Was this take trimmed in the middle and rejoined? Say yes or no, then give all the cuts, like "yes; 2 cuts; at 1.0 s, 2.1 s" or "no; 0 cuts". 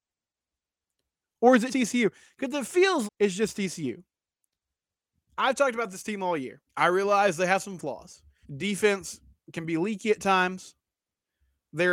yes; 4 cuts; at 1.7 s, 3.1 s, 6.7 s, 8.4 s